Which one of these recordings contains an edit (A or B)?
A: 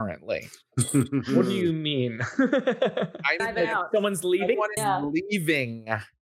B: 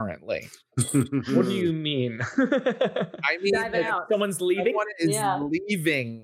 A